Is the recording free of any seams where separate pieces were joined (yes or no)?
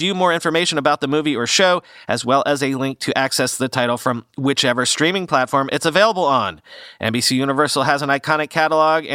yes